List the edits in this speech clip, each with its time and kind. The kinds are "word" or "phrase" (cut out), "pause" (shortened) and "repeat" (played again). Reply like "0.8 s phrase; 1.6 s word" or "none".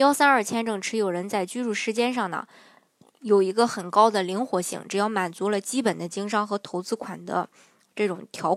none